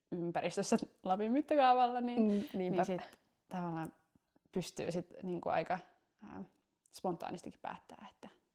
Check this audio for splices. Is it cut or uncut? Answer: uncut